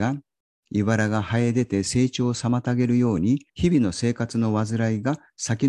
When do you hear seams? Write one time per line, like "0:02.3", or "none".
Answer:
0:03.5

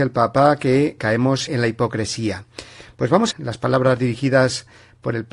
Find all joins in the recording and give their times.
0:01.0
0:01.5
0:03.3

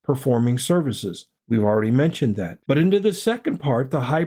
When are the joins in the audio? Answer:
0:01.4
0:02.6

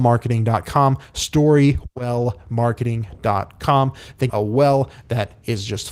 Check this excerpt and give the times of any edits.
0:04.3

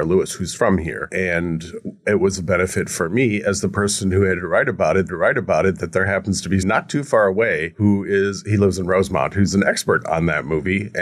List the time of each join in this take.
0:05.1
0:06.6

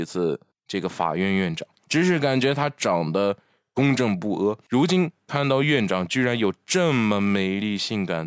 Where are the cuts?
none

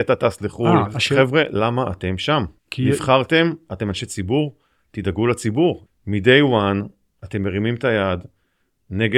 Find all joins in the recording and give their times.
0:02.6

